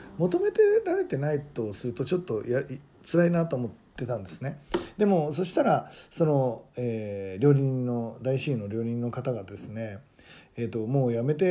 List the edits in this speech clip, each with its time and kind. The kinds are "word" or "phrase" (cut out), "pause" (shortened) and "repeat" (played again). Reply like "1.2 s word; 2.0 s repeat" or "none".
none